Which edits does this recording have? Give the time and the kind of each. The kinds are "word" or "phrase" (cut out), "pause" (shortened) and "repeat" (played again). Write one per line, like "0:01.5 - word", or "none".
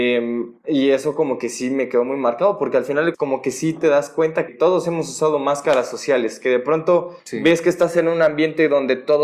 0:03.1 - phrase
0:04.5 - word
0:07.2 - pause